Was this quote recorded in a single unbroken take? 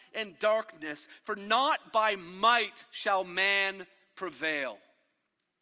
yes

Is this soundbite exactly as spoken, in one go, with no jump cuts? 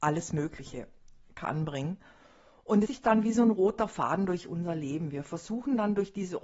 no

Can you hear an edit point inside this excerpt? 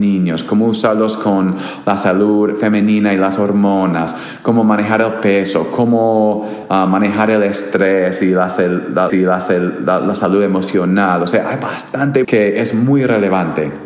yes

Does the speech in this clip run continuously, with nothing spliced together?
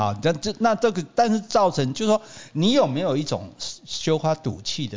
yes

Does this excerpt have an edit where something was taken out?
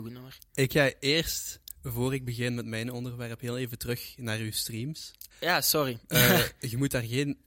yes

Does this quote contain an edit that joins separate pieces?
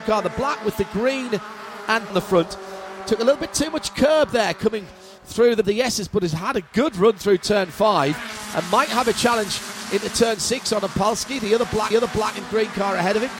yes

